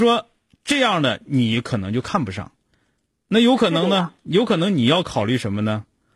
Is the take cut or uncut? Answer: uncut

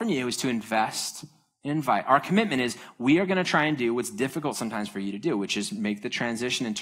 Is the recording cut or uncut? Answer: uncut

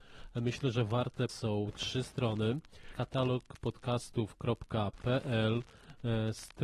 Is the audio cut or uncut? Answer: cut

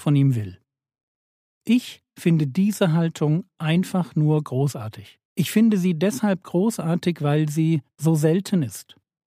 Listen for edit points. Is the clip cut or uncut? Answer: cut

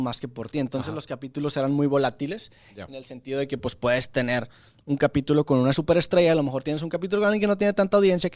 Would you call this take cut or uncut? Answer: uncut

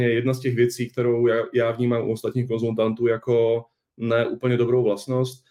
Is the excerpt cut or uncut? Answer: uncut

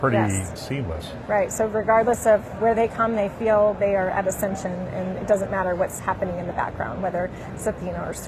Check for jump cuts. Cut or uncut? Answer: uncut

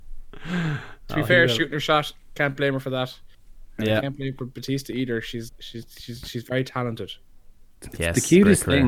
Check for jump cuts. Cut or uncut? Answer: cut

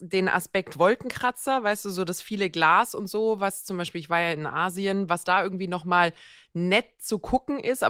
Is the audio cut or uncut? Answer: uncut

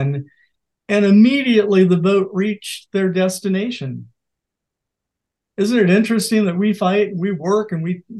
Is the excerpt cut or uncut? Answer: uncut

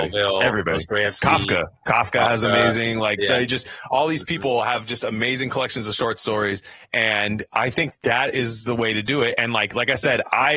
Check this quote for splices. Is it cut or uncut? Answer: uncut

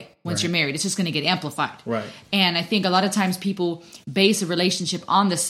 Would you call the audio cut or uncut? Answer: uncut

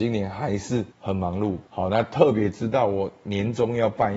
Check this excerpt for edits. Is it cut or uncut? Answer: cut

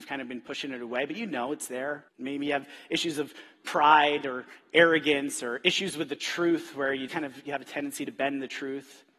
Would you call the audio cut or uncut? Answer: cut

